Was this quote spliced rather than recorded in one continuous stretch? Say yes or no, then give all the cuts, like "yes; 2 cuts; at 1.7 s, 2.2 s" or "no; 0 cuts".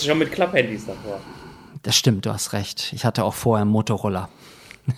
no; 0 cuts